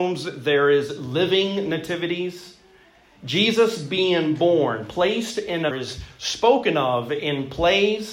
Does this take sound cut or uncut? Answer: cut